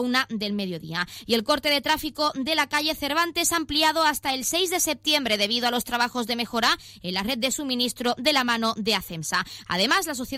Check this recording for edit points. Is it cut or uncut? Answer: uncut